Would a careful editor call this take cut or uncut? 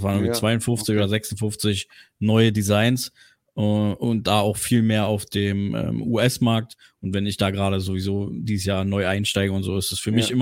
uncut